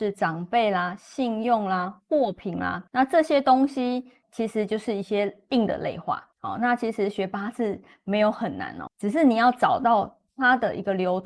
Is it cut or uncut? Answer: cut